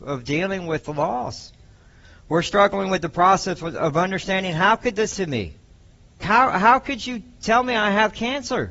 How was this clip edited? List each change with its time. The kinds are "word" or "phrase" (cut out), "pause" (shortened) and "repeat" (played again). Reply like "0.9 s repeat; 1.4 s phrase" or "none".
5.1 s word; 6.2 s word